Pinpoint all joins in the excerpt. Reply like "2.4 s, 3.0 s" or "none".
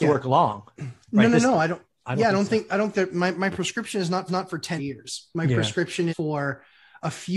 1.0 s, 2.9 s, 4.3 s, 4.8 s, 6.1 s